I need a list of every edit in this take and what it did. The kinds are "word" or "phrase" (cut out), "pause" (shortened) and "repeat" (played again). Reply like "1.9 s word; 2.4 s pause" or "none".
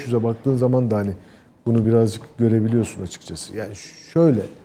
none